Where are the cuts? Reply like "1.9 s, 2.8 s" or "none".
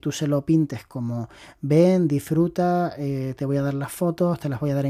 none